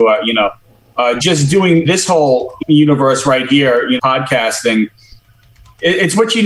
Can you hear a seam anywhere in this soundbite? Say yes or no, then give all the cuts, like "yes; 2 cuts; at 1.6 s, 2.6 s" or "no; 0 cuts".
yes; 4 cuts; at 1.2 s, 1.8 s, 2.6 s, 4.0 s